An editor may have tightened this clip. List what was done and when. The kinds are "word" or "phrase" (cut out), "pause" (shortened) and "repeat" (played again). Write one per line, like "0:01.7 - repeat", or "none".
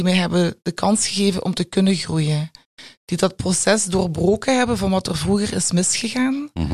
none